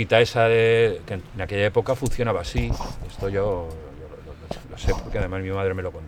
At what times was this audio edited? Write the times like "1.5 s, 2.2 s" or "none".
none